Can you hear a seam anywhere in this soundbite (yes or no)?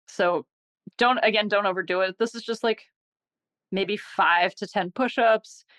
no